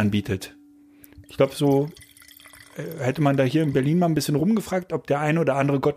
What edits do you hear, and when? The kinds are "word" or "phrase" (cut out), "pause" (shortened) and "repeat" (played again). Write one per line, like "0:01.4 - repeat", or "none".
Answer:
none